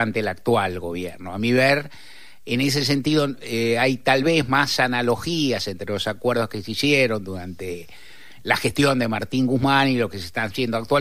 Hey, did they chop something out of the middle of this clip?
no; 0 cuts

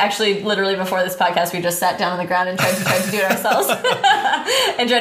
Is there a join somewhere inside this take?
yes; 1 cut; at 2.8 s

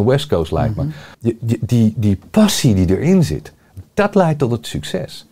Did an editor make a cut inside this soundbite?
yes; 1 cut; at 1.1 s

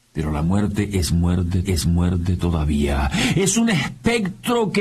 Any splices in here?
yes; 1 cut; at 1.6 s

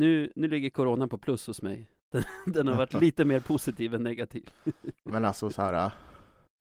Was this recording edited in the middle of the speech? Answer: yes; 1 cut; at 5.0 s

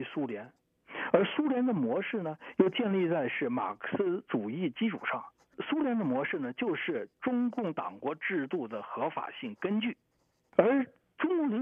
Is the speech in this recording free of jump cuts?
yes; 0 cuts

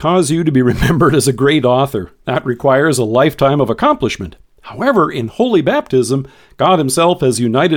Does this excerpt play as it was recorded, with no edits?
yes; 0 cuts

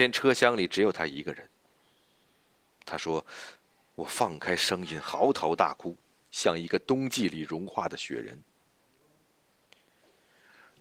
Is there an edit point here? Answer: no; 0 cuts

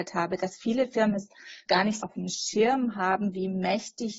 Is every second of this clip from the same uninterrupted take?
no; 2 cuts; at 1.7 s, 2.0 s

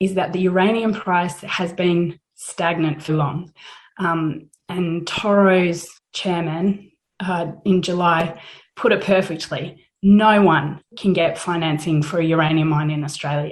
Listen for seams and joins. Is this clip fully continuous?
no; 2 cuts; at 3.1 s, 6.0 s

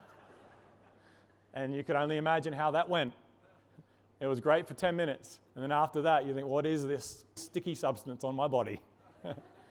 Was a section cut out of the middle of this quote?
yes; 2 cuts; at 5.5 s, 7.4 s

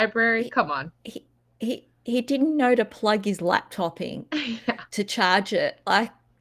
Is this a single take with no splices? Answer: yes; 0 cuts

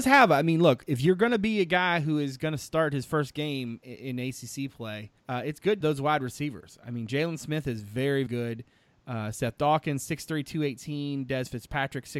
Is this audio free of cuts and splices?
no; 3 cuts; at 5.2 s, 5.8 s, 8.3 s

